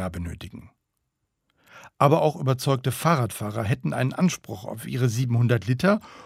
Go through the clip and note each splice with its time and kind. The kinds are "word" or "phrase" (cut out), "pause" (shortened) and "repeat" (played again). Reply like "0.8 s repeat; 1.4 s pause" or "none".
none